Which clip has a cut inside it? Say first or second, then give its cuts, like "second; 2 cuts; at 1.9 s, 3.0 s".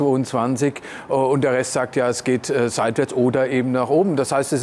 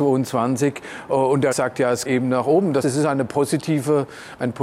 second; 3 cuts; at 1.5 s, 2.1 s, 2.8 s